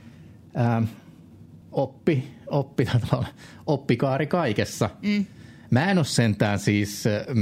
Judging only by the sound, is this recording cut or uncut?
cut